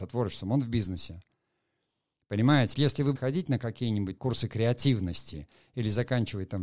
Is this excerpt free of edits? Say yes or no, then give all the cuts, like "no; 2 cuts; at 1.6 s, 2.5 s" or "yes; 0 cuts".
no; 3 cuts; at 2.7 s, 3.2 s, 4.2 s